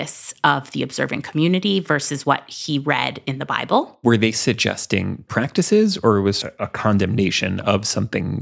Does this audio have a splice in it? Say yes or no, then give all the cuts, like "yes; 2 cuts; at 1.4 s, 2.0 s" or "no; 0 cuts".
yes; 2 cuts; at 5.3 s, 6.4 s